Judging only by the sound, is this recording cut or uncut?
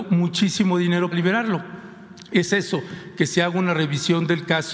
cut